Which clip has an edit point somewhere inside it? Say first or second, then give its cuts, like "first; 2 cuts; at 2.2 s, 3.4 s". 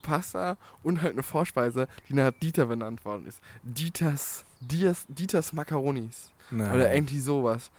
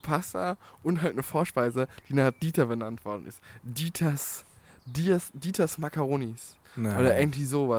first; 1 cut; at 4.5 s